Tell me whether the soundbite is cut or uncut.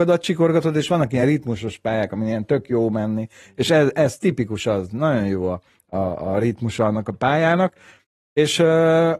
uncut